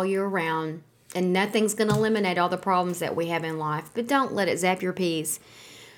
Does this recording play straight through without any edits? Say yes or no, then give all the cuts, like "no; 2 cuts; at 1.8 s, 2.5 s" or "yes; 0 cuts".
yes; 0 cuts